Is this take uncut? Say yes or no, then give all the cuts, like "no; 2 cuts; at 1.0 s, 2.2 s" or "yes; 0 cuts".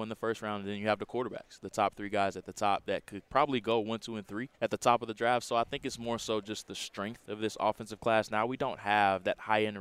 no; 2 cuts; at 3.3 s, 4.5 s